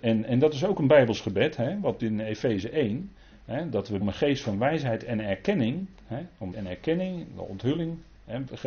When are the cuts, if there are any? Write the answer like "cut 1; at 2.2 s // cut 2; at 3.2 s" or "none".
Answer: cut 1; at 2.0 s // cut 2; at 4.0 s // cut 3; at 6.0 s // cut 4; at 6.5 s